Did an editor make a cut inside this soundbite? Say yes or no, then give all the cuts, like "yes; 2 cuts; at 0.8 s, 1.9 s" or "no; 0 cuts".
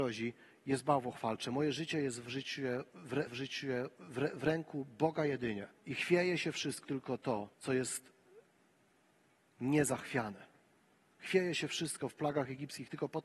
yes; 4 cuts; at 3.3 s, 5.8 s, 6.8 s, 7.5 s